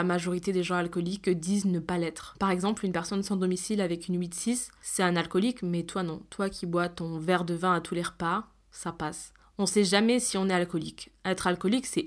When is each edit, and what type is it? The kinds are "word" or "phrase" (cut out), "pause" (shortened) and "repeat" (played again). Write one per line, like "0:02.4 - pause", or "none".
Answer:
none